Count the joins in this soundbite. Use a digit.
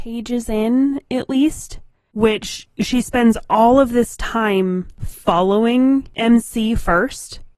0